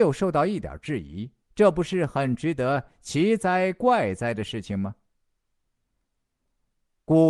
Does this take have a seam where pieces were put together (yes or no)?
yes